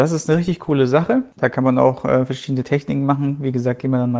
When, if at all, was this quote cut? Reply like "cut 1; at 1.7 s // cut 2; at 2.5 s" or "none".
cut 1; at 1.3 s